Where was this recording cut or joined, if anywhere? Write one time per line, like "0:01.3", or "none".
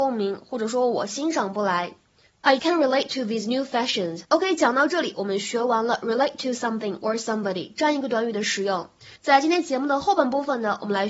0:02.6
0:04.2
0:09.2

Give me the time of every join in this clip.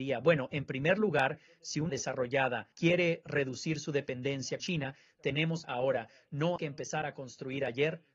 0:01.9
0:02.7
0:04.6
0:05.6
0:06.6

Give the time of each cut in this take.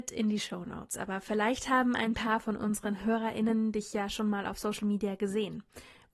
none

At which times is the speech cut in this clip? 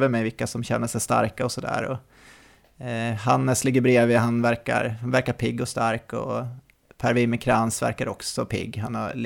none

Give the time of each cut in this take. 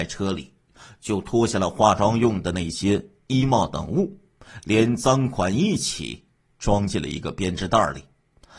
none

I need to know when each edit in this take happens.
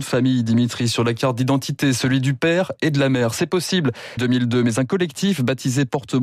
0:04.2

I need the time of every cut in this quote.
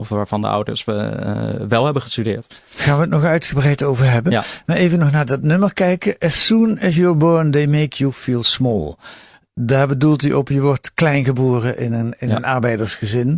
none

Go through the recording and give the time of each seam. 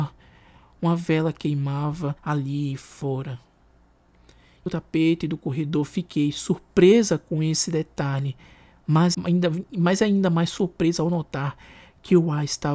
0:02.2
0:04.7
0:09.1

